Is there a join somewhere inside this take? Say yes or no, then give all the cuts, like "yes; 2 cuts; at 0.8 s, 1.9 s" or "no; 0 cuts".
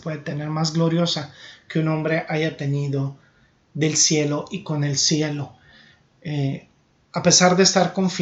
no; 0 cuts